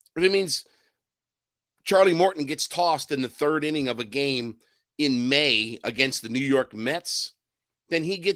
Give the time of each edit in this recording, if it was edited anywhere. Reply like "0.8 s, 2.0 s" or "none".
none